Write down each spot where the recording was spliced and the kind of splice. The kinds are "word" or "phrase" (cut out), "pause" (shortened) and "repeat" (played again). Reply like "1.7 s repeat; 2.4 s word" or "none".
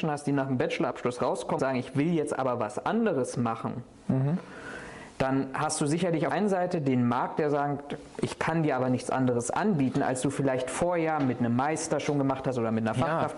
1.6 s word; 6.3 s phrase